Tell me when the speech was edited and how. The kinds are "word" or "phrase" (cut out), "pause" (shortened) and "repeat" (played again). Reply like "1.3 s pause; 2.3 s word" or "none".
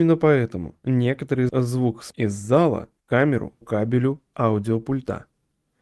1.5 s word; 2.1 s word; 3.0 s pause; 3.6 s word; 4.3 s word

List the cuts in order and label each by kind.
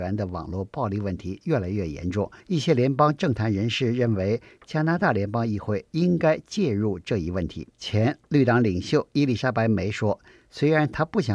2.4 s pause; 7.7 s pause

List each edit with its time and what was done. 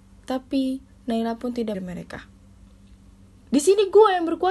1.7 s phrase

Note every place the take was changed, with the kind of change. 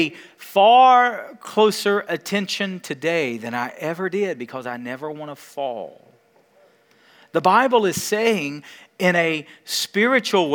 none

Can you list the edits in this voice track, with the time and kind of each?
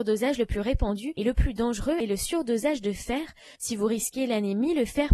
3.5 s pause

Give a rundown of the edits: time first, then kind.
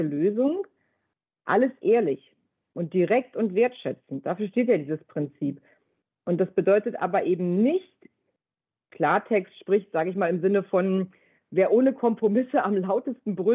none

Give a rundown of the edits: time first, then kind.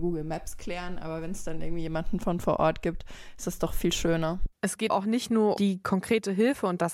4.9 s word; 5.6 s word

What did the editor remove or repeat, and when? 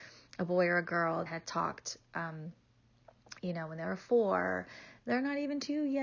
1.3 s word

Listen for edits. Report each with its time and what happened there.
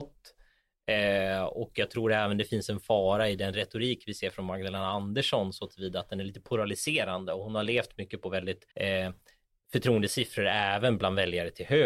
8.7 s pause

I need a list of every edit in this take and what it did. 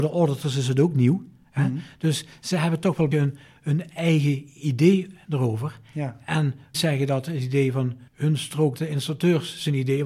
3.1 s word; 6.7 s phrase; 8.1 s pause; 8.8 s word

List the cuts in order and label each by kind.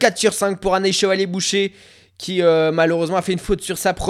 none

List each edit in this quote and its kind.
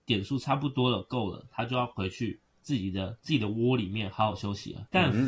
none

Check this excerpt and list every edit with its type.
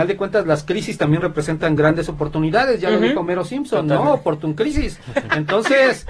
none

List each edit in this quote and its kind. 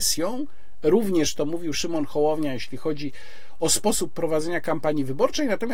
none

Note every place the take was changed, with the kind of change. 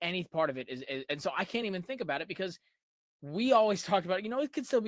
none

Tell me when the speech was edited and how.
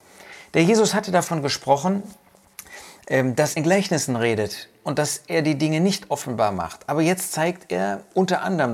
3.6 s word

